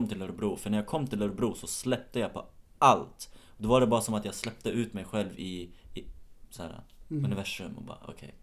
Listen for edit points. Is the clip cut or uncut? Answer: uncut